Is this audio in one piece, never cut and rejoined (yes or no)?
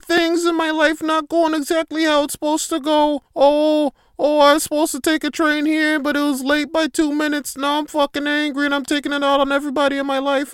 no